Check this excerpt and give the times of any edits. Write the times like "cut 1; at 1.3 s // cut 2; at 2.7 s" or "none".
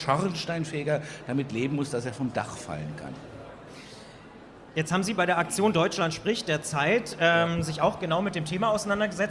none